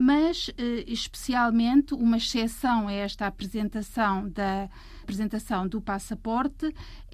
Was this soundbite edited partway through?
yes; 1 cut; at 5.0 s

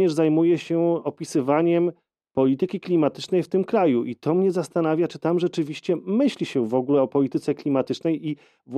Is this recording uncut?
yes; 0 cuts

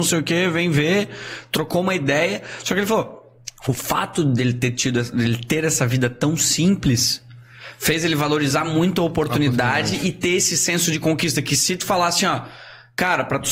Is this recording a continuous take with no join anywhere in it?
yes; 0 cuts

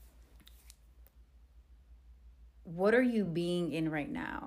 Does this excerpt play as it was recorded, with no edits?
yes; 0 cuts

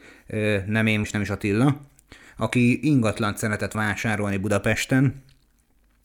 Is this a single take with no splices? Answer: no; 2 cuts; at 1.0 s, 3.7 s

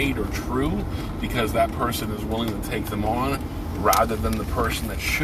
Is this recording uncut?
yes; 0 cuts

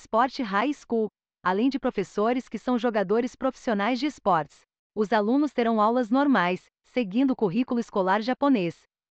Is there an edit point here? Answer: no; 0 cuts

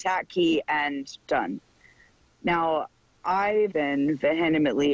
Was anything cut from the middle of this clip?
yes; 2 cuts; at 1.3 s, 3.7 s

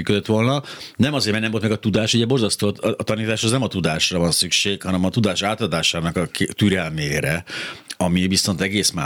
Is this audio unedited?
yes; 0 cuts

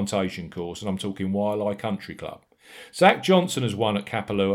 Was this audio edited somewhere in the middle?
no; 0 cuts

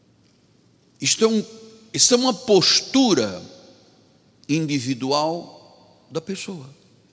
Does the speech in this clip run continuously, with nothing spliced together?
yes; 0 cuts

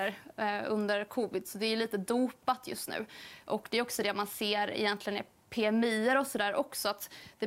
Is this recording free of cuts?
yes; 0 cuts

